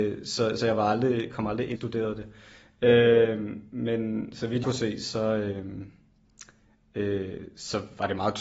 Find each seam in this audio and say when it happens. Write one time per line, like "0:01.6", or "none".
0:01.8
0:04.6

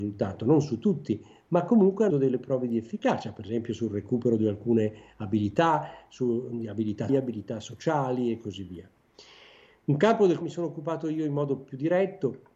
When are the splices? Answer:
0:02.1
0:07.1
0:10.4

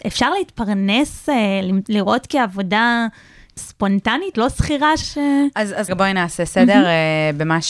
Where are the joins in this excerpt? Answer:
0:03.6
0:04.3
0:05.0
0:05.9

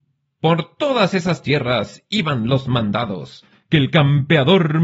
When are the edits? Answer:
none

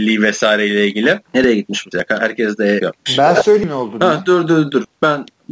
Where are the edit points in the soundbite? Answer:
0:01.2
0:01.9
0:02.8

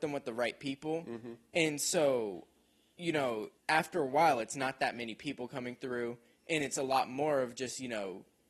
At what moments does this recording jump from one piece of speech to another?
0:03.6

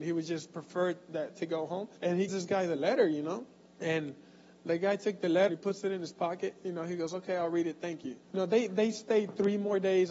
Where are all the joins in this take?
0:02.0
0:02.3
0:03.7
0:05.5
0:08.2

